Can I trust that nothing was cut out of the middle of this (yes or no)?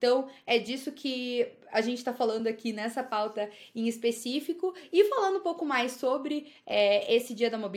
yes